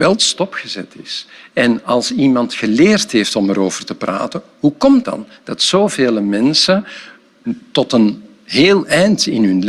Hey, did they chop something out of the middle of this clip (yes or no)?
yes